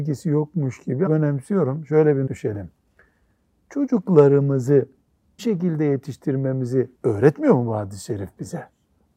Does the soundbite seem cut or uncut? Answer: cut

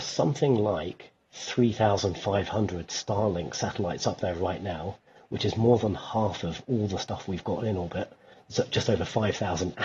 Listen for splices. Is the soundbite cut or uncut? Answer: uncut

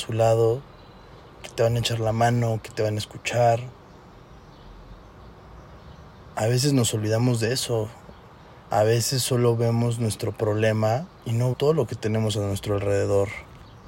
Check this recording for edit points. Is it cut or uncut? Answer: cut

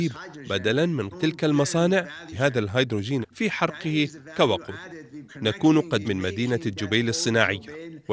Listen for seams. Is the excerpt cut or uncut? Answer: cut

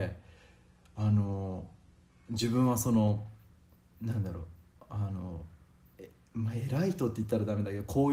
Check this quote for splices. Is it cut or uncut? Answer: uncut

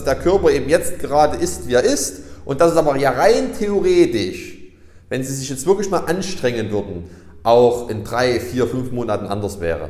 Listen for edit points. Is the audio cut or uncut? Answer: uncut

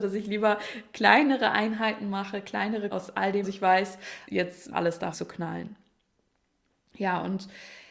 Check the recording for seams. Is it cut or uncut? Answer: cut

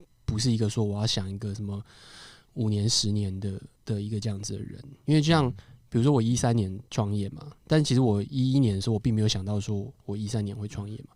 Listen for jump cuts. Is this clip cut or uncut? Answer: cut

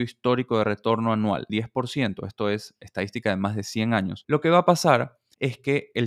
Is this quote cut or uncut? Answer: cut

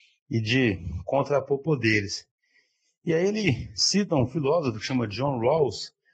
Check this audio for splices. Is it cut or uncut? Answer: uncut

